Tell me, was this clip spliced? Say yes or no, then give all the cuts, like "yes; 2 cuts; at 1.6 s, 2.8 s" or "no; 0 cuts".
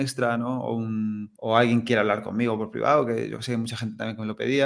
yes; 1 cut; at 1.4 s